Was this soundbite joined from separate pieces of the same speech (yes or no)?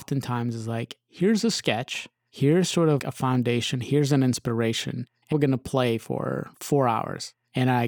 yes